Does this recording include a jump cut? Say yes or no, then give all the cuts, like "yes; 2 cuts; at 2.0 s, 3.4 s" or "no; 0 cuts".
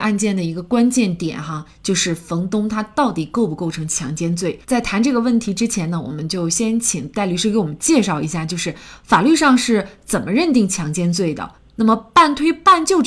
yes; 1 cut; at 4.6 s